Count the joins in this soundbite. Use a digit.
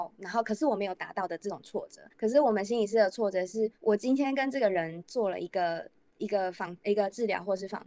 2